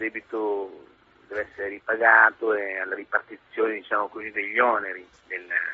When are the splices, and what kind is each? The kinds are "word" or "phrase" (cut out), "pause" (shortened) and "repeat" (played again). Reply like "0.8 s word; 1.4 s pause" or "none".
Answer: none